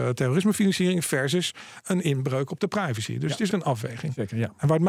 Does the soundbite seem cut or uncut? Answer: cut